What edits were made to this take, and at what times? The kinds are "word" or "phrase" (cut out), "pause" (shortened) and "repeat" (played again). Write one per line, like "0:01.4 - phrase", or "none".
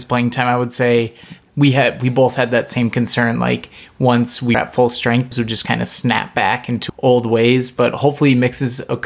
0:04.5 - word
0:05.3 - word
0:06.9 - word